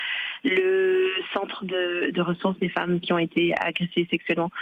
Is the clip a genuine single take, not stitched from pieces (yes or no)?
yes